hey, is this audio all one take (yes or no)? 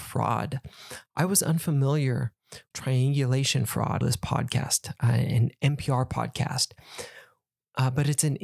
no